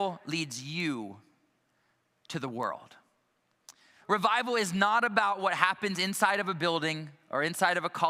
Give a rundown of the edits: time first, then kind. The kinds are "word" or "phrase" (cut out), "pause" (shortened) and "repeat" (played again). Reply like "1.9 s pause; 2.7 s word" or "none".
none